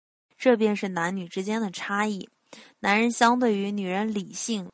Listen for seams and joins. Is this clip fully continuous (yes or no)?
yes